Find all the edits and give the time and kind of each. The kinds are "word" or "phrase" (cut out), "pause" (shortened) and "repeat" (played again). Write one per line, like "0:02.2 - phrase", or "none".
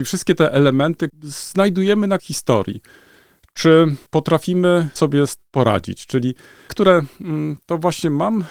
0:01.1 - word
0:02.2 - word
0:05.0 - word
0:05.4 - word
0:06.7 - word